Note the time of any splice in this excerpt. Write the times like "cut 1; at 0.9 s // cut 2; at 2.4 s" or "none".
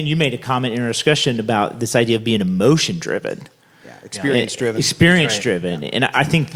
none